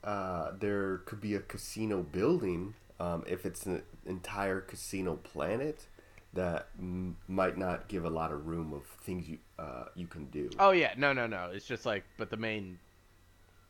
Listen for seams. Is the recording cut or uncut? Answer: uncut